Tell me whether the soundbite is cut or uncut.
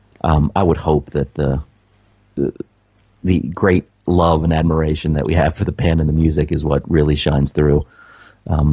uncut